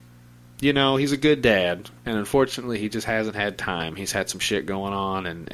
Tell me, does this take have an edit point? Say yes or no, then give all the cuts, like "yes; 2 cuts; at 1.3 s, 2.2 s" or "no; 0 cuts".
yes; 1 cut; at 2.0 s